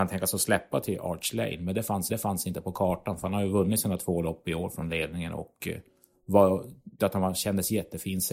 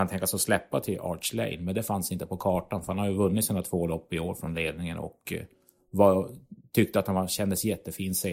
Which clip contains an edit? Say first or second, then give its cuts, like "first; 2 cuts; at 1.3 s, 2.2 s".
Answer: first; 2 cuts; at 2.1 s, 7.0 s